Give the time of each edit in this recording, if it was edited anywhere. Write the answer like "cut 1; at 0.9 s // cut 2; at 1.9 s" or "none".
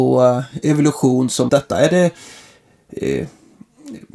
cut 1; at 1.5 s

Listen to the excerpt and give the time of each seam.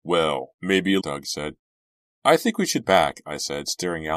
cut 1; at 1.0 s // cut 2; at 2.8 s

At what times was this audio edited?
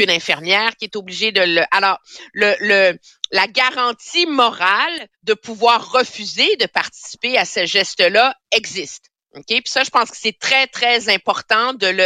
cut 1; at 5.1 s

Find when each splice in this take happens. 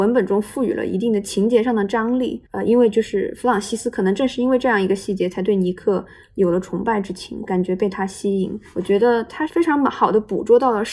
cut 1; at 2.5 s

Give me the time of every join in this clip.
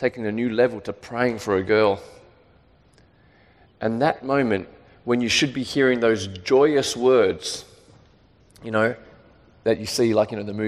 none

